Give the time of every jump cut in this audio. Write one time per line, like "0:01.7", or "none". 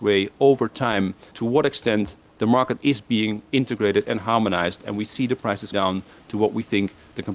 0:01.3
0:05.7